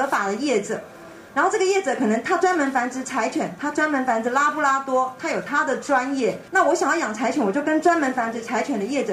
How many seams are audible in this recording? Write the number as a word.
one